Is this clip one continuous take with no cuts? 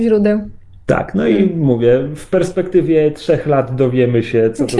yes; 0 cuts

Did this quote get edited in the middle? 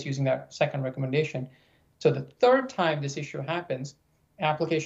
no; 0 cuts

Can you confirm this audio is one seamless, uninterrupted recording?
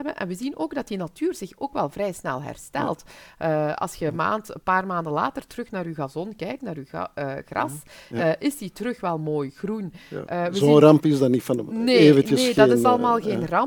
yes; 0 cuts

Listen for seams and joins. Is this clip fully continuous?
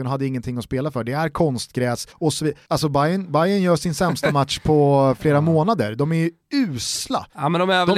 no; 2 cuts; at 2.1 s, 2.6 s

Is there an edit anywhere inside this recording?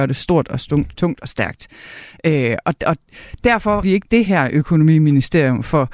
yes; 3 cuts; at 1.0 s, 2.6 s, 3.8 s

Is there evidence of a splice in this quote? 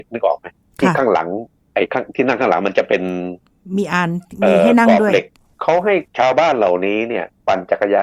yes; 1 cut; at 6.1 s

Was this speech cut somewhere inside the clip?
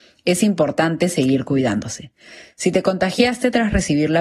no; 0 cuts

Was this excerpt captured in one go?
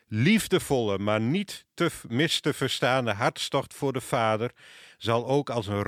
yes; 0 cuts

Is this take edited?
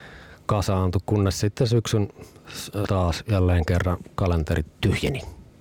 yes; 1 cut; at 2.9 s

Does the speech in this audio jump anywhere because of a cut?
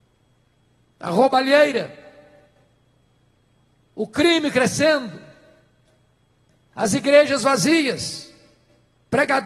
no; 0 cuts

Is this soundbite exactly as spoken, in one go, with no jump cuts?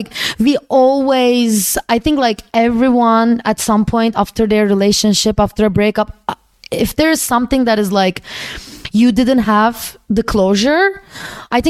yes; 0 cuts

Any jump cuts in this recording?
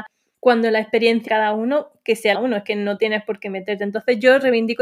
yes; 2 cuts; at 1.3 s, 2.3 s

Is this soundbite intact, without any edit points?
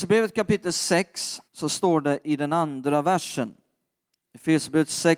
no; 1 cut; at 1.5 s

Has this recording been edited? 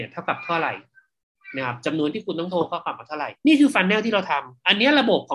yes; 2 cuts; at 2.1 s, 3.4 s

